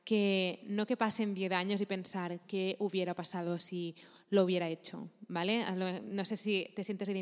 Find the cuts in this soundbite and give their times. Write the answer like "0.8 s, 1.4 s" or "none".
none